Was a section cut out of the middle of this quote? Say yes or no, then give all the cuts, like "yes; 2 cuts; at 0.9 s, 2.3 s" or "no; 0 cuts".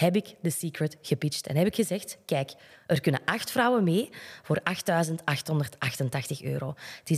no; 0 cuts